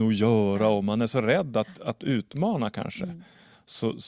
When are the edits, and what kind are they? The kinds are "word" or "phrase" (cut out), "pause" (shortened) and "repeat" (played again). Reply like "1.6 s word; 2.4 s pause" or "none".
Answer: none